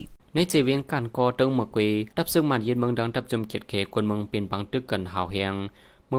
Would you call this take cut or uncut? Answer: cut